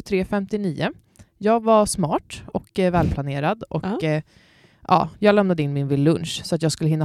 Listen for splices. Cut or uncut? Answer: uncut